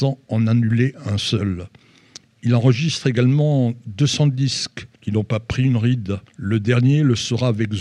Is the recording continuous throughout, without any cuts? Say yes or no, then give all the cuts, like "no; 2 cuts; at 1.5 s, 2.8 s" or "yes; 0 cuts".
no; 2 cuts; at 4.9 s, 6.3 s